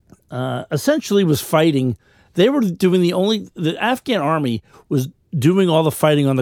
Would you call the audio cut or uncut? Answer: uncut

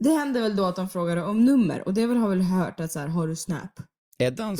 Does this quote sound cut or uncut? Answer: uncut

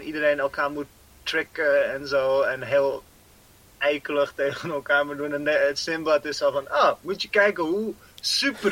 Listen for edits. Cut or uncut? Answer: uncut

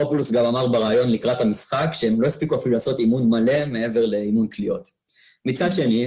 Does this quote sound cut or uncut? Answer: uncut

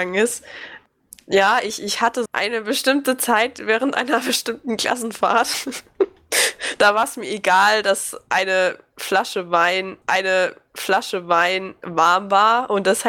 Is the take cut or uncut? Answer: cut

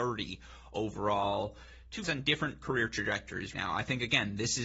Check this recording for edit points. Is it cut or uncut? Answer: cut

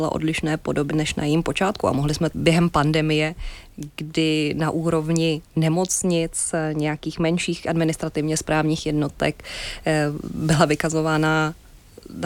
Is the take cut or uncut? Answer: cut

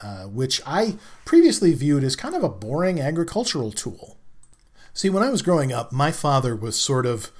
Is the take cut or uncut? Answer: uncut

